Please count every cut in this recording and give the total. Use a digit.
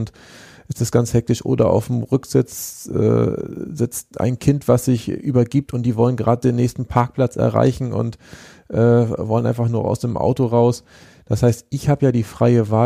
0